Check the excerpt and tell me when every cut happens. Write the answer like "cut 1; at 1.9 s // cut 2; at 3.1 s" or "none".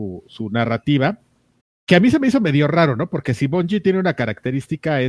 cut 1; at 1.6 s